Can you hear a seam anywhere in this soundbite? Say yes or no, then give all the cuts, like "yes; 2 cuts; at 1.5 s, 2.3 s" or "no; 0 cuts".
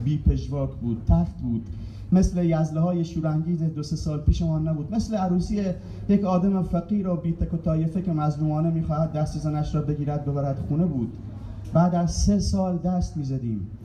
no; 0 cuts